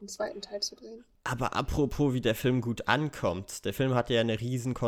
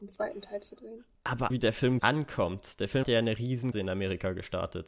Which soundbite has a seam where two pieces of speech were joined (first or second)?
second